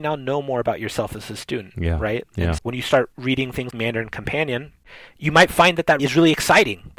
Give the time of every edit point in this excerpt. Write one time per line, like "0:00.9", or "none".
0:02.6
0:03.7
0:06.0